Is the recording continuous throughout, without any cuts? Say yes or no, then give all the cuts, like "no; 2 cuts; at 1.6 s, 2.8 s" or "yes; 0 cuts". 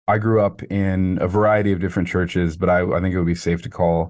yes; 0 cuts